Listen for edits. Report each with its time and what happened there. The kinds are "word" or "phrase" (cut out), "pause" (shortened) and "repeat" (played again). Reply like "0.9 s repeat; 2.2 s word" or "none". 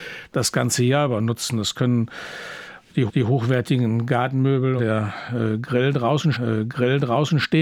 3.1 s repeat; 4.8 s word; 6.3 s repeat